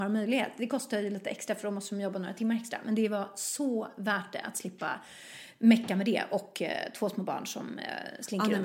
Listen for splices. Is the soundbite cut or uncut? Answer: uncut